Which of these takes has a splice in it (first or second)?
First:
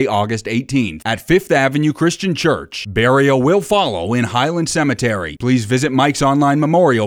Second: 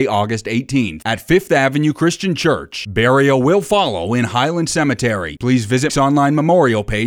second